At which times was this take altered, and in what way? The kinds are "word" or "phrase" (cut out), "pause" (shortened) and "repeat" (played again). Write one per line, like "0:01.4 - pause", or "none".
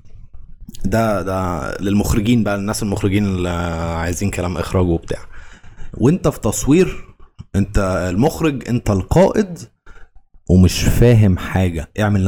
none